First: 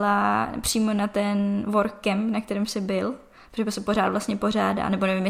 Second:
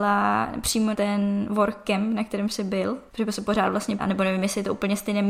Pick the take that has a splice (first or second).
second